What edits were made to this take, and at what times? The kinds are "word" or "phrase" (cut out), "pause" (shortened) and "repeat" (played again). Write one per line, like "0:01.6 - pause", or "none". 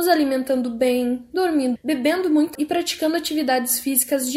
0:01.8 - word
0:02.5 - word